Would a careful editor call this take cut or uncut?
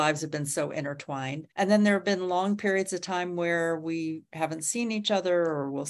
cut